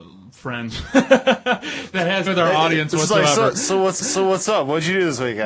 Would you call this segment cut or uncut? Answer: cut